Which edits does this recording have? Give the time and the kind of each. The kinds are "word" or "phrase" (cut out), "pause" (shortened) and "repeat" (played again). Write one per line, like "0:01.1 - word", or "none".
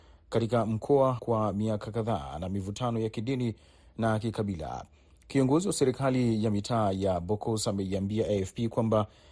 0:01.2 - word